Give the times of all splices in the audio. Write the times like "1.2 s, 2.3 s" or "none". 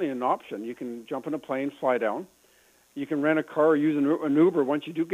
none